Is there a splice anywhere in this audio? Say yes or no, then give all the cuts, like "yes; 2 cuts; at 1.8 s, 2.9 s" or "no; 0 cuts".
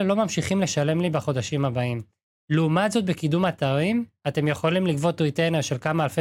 no; 0 cuts